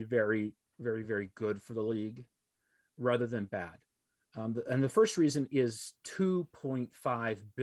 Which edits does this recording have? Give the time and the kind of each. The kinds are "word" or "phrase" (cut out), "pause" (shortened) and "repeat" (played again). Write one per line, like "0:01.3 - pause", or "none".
none